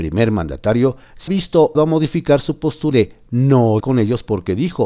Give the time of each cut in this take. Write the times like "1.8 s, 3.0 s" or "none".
1.3 s, 1.7 s, 2.9 s, 3.8 s